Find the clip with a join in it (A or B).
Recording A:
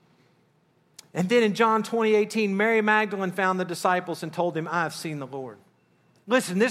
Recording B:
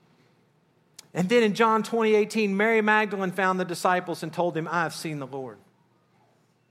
A